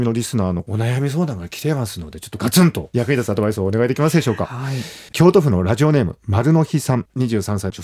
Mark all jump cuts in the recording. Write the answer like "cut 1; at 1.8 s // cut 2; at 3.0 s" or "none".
cut 1; at 5.1 s